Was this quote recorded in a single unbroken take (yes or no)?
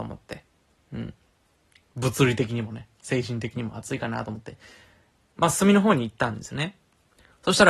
yes